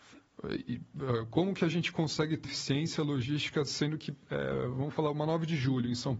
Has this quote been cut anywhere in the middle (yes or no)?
yes